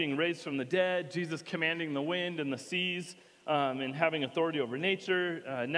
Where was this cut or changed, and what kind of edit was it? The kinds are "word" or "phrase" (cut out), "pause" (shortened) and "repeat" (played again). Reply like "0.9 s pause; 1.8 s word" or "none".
none